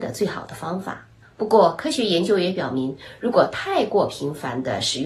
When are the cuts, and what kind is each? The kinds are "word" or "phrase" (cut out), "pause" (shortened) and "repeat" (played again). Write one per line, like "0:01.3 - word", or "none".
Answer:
0:01.2 - pause